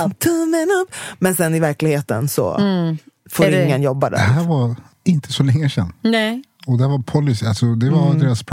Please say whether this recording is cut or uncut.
uncut